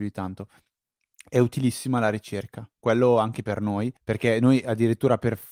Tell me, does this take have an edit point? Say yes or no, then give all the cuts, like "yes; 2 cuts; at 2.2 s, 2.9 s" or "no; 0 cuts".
yes; 1 cut; at 4.0 s